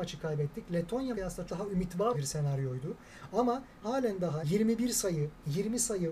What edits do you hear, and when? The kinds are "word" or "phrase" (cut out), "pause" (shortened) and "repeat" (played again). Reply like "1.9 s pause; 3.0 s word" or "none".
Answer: 1.1 s word; 1.5 s word; 2.1 s word; 3.8 s word; 4.4 s word